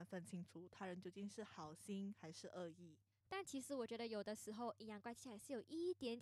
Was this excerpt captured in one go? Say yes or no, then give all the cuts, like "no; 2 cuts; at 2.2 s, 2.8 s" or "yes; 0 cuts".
yes; 0 cuts